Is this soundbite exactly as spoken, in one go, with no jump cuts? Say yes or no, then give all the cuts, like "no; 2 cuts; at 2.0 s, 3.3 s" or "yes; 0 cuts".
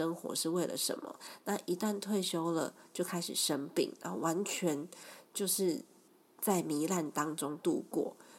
yes; 0 cuts